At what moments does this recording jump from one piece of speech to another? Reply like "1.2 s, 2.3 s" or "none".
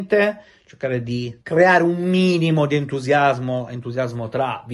1.4 s